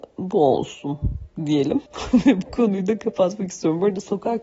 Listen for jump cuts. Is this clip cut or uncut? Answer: cut